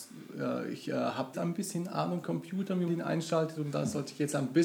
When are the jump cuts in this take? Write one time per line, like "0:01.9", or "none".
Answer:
0:01.3
0:02.2
0:02.9